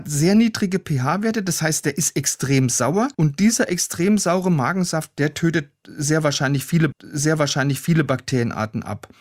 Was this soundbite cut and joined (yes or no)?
yes